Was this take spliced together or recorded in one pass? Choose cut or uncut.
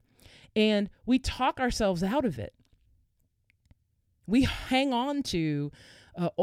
uncut